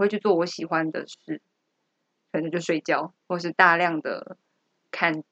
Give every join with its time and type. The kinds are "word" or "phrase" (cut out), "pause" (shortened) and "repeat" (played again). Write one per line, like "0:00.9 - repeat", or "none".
0:03.2 - pause

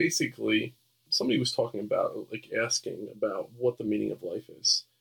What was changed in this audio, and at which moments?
none

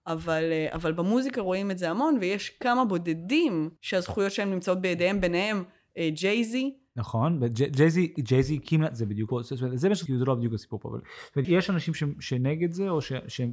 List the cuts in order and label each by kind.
0:03.8 - pause
0:09.3 - word
0:10.1 - phrase
0:11.4 - word

